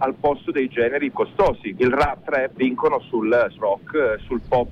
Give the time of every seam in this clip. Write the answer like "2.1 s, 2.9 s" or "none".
1.1 s, 1.8 s, 2.2 s, 2.6 s, 3.6 s